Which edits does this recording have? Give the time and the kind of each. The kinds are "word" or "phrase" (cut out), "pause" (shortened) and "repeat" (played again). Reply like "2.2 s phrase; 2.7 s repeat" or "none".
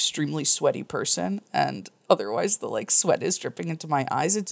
none